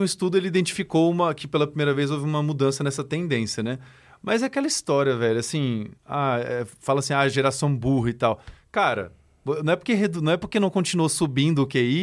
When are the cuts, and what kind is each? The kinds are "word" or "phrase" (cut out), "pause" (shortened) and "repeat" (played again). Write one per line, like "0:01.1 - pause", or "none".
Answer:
0:06.0 - pause